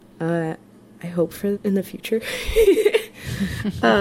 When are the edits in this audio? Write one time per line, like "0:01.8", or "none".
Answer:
0:01.5